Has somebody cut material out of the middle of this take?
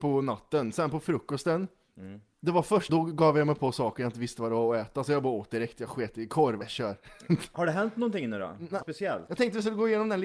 yes; 4 cuts; at 2.3 s, 2.9 s, 6.6 s, 8.8 s

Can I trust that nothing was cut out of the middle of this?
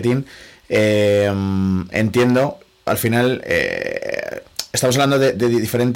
no; 1 cut; at 2.9 s

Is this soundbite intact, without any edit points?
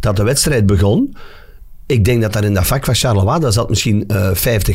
yes; 0 cuts

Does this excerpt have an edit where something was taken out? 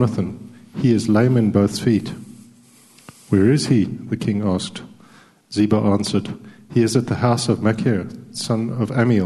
no; 0 cuts

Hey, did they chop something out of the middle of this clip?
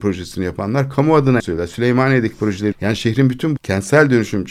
yes; 3 cuts; at 1.4 s, 2.7 s, 3.6 s

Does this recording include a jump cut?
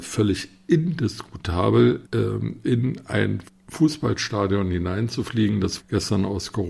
yes; 3 cuts; at 2.1 s, 3.5 s, 5.8 s

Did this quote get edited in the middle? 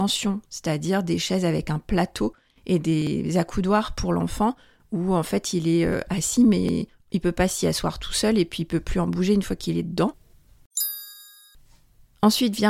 no; 0 cuts

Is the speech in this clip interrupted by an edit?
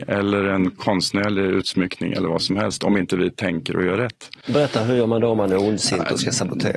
no; 0 cuts

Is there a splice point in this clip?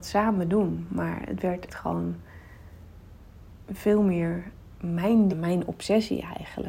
yes; 2 cuts; at 1.7 s, 5.3 s

